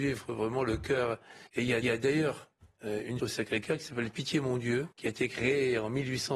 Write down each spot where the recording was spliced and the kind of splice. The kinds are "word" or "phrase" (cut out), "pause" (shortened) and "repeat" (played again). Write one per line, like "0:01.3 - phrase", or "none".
0:01.5 - pause
0:01.8 - repeat
0:03.2 - phrase
0:04.9 - pause